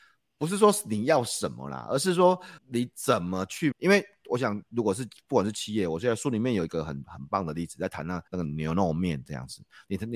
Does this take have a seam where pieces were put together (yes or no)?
yes